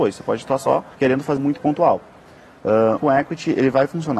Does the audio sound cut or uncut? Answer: cut